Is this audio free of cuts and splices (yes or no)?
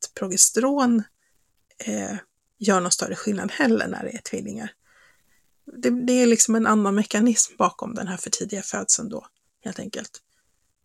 yes